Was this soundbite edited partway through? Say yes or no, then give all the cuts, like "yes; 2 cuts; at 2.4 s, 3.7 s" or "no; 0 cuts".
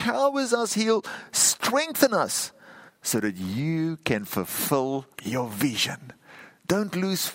yes; 2 cuts; at 2.9 s, 5.1 s